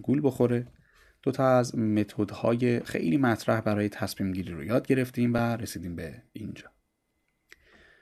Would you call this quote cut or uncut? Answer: uncut